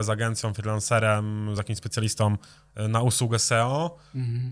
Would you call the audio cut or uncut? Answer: uncut